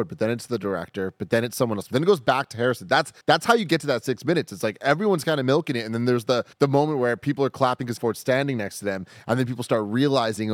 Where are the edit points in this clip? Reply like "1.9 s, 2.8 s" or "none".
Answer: 3.2 s, 6.5 s, 8.0 s